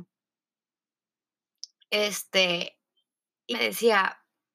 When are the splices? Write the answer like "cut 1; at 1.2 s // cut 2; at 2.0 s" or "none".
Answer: cut 1; at 3.5 s